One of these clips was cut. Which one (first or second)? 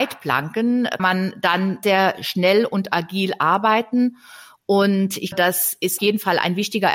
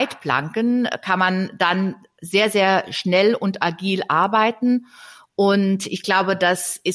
first